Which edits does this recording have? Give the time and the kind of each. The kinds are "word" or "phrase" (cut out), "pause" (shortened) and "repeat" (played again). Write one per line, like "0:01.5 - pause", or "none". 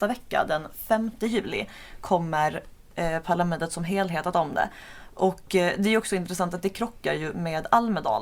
0:04.3 - word